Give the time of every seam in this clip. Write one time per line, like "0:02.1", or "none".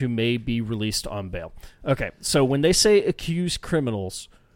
none